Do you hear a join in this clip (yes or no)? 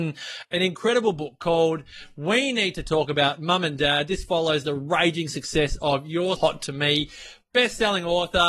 yes